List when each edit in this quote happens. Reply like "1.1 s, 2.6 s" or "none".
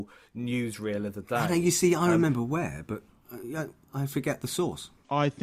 none